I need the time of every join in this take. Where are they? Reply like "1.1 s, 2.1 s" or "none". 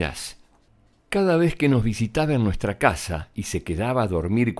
none